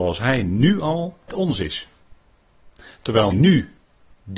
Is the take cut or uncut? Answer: cut